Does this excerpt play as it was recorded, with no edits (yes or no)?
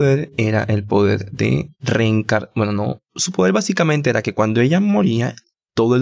no